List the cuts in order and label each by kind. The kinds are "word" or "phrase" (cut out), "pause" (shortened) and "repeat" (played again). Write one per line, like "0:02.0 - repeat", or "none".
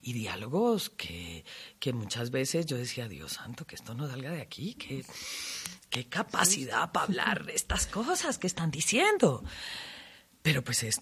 none